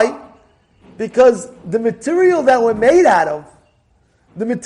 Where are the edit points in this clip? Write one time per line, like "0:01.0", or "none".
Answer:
none